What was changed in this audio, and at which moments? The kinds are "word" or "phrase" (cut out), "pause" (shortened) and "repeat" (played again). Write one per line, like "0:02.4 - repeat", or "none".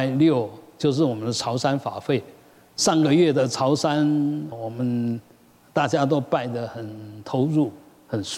0:04.5 - word